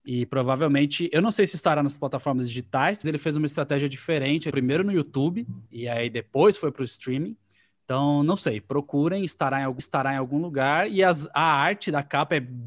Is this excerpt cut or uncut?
cut